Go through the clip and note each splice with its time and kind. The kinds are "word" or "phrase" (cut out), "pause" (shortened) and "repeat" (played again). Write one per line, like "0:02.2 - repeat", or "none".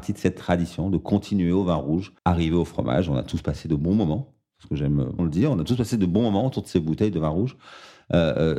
0:02.2 - pause
0:05.2 - word